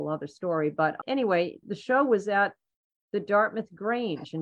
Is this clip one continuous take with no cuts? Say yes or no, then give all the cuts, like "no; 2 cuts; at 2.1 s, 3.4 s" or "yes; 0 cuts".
no; 1 cut; at 1.6 s